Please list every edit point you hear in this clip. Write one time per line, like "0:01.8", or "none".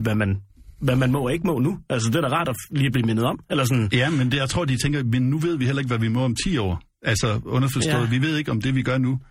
none